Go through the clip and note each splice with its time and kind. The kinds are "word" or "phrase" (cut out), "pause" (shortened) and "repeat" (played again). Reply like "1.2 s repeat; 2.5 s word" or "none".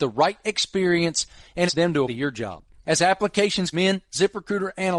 1.7 s word; 2.1 s word; 3.7 s word